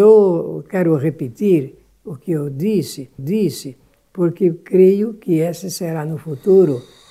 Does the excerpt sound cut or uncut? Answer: cut